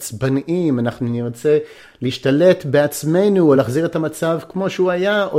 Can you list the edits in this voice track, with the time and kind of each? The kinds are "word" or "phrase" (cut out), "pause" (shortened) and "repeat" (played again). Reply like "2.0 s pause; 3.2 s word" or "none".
none